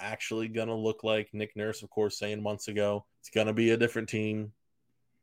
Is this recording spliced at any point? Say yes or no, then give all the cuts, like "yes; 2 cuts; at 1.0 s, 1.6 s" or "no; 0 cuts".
yes; 1 cut; at 3.1 s